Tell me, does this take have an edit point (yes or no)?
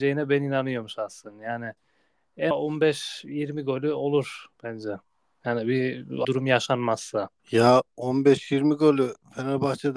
yes